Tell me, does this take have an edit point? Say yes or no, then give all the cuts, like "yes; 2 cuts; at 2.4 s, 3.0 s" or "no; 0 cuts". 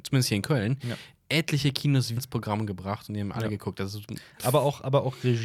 yes; 1 cut; at 2.2 s